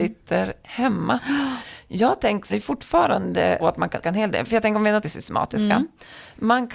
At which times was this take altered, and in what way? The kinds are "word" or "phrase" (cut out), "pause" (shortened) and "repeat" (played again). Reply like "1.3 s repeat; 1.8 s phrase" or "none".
2.5 s phrase; 3.6 s word; 4.0 s word; 5.0 s word